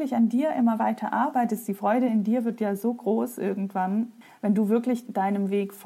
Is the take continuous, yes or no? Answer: yes